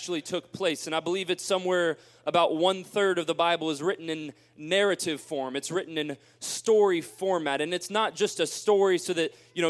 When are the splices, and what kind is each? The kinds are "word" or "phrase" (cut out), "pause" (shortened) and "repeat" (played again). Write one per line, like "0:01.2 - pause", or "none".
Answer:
none